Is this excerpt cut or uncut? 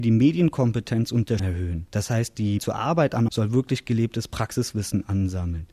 cut